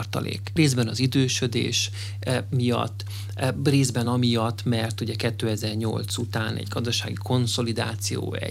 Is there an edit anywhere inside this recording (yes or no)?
no